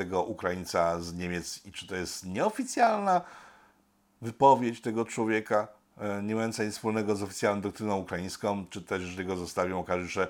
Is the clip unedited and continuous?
yes; 0 cuts

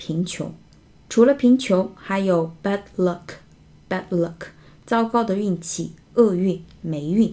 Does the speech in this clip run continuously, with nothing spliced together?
yes; 0 cuts

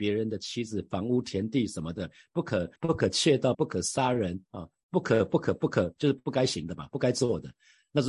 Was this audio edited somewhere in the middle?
yes; 2 cuts; at 2.8 s, 3.5 s

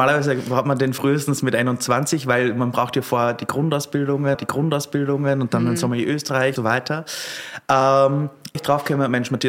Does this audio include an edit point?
yes; 3 cuts; at 4.3 s, 6.6 s, 8.5 s

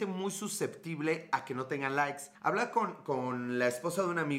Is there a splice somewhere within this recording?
yes; 1 cut; at 2.3 s

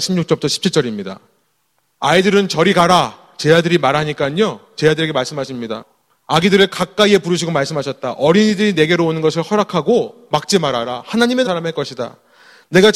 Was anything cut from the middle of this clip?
yes; 1 cut; at 11.4 s

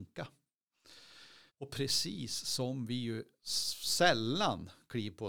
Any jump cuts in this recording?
yes; 1 cut; at 1.5 s

